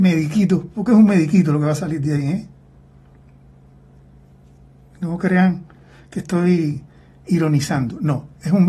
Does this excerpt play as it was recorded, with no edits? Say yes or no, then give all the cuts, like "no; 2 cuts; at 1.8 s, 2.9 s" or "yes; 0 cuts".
yes; 0 cuts